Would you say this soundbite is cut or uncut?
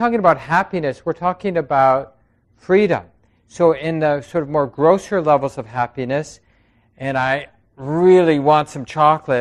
uncut